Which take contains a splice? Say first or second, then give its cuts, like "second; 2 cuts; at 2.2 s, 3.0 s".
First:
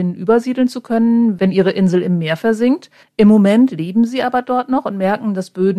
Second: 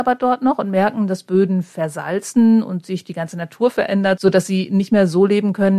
first; 1 cut; at 3.0 s